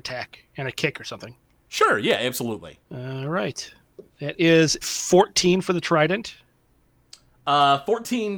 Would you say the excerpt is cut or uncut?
cut